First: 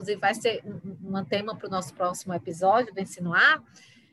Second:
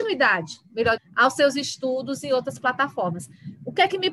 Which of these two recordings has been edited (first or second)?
second